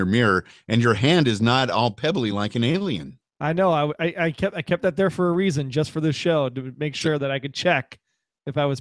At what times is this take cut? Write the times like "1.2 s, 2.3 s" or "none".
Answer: none